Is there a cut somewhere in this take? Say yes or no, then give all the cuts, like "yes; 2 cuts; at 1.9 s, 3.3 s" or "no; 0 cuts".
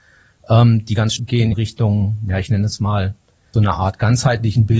yes; 3 cuts; at 1.2 s, 1.5 s, 3.5 s